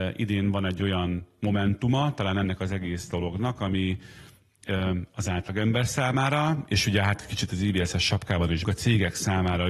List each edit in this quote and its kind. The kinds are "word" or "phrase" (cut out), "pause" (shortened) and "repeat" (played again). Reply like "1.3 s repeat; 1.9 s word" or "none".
8.6 s word